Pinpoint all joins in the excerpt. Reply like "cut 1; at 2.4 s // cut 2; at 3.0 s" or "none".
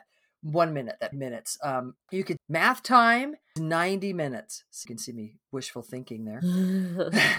cut 1; at 1.1 s // cut 2; at 2.0 s // cut 3; at 2.4 s // cut 4; at 3.6 s // cut 5; at 4.9 s